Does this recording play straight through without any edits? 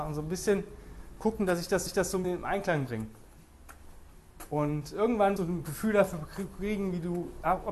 no; 3 cuts; at 1.9 s, 2.2 s, 5.4 s

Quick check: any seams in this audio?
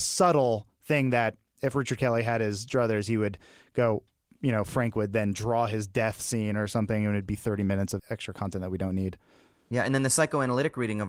yes; 1 cut; at 8.0 s

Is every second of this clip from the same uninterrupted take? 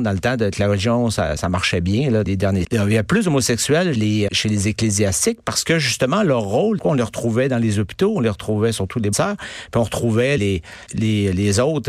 no; 9 cuts; at 1.4 s, 2.2 s, 2.6 s, 3.9 s, 4.3 s, 6.8 s, 9.1 s, 10.4 s, 10.9 s

